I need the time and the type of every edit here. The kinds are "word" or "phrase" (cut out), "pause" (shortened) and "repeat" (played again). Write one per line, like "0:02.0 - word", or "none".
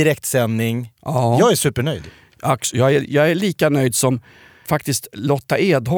0:04.6 - word